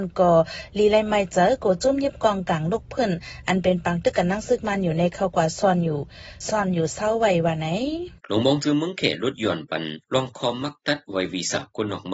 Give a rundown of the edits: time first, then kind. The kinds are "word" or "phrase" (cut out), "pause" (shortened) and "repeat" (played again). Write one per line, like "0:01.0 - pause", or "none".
0:08.2 - pause
0:10.0 - pause